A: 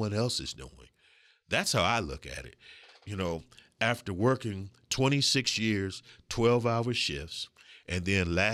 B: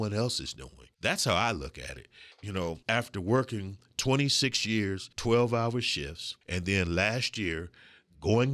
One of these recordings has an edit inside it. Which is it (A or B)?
B